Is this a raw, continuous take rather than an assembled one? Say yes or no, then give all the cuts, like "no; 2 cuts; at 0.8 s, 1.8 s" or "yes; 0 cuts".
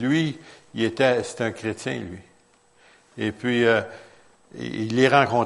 yes; 0 cuts